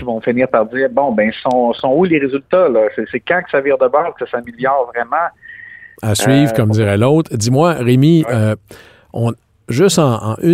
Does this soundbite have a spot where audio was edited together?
no; 0 cuts

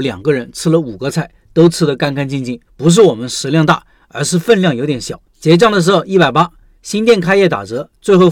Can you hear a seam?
yes; 2 cuts; at 2.7 s, 5.3 s

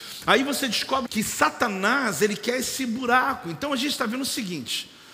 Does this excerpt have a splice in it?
yes; 1 cut; at 1.1 s

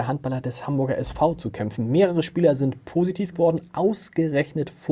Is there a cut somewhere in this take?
yes; 1 cut; at 3.3 s

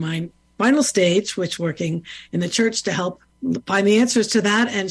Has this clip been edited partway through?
yes; 1 cut; at 1.6 s

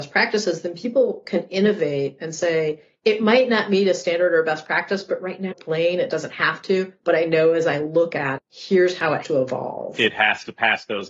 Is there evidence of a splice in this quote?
yes; 3 cuts; at 5.5 s, 8.4 s, 9.2 s

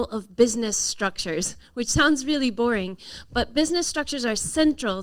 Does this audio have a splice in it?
no; 0 cuts

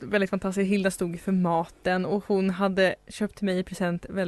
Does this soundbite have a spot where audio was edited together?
no; 0 cuts

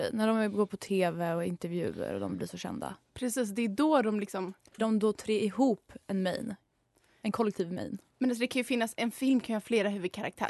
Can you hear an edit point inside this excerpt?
yes; 1 cut; at 4.8 s

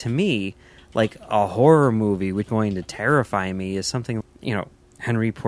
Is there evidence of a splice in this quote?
yes; 2 cuts; at 2.5 s, 4.2 s

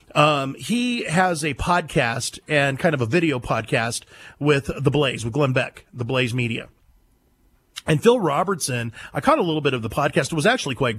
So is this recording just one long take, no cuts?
yes; 0 cuts

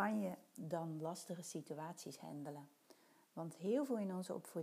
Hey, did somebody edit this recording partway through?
no; 0 cuts

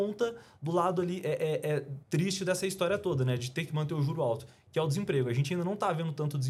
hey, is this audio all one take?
no; 1 cut; at 2.0 s

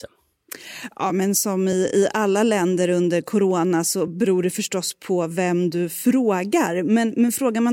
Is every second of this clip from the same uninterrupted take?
yes; 0 cuts

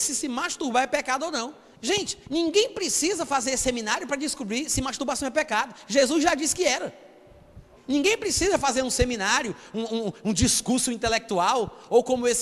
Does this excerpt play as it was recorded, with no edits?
no; 2 cuts; at 2.2 s, 7.7 s

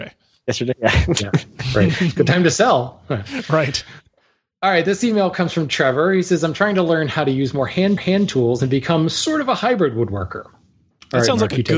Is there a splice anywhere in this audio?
yes; 1 cut; at 8.0 s

